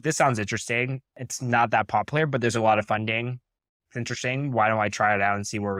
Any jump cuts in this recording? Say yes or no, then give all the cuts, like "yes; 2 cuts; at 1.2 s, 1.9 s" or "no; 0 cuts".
no; 0 cuts